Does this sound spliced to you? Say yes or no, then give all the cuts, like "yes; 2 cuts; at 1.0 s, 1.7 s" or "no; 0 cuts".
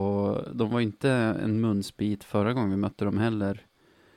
no; 0 cuts